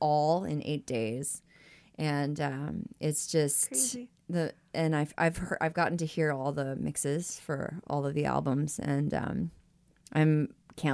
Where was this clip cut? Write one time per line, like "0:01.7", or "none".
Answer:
none